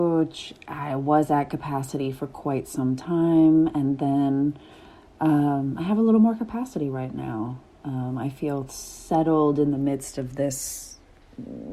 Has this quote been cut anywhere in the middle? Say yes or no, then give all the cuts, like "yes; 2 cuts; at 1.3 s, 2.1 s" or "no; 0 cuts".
no; 0 cuts